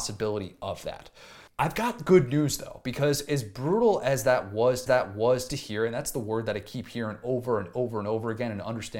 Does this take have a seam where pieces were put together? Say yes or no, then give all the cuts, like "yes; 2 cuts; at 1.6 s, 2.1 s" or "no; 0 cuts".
yes; 2 cuts; at 1.5 s, 4.9 s